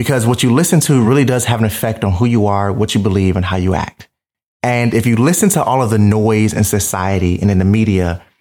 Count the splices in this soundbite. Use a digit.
0